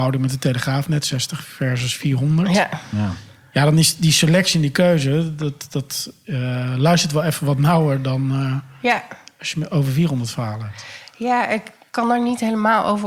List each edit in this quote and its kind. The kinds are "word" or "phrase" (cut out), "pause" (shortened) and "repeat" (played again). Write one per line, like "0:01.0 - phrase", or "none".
none